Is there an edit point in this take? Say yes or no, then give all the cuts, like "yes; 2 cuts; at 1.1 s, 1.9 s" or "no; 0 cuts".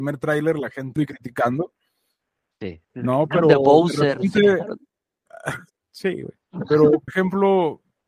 yes; 5 cuts; at 1.0 s, 2.8 s, 5.7 s, 6.4 s, 7.1 s